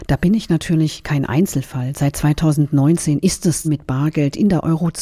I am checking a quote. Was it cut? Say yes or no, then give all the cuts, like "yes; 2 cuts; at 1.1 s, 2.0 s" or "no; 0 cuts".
yes; 1 cut; at 3.6 s